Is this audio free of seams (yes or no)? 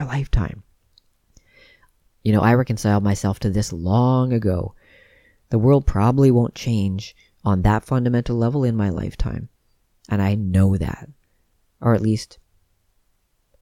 yes